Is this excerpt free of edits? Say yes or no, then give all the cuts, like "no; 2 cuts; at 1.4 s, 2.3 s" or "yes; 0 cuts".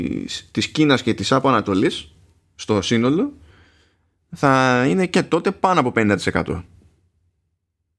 yes; 0 cuts